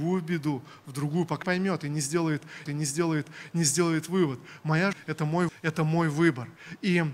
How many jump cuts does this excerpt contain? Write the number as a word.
four